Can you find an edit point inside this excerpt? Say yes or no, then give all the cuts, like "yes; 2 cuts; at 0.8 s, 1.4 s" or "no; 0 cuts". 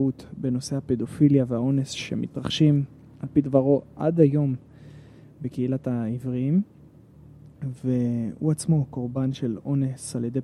no; 0 cuts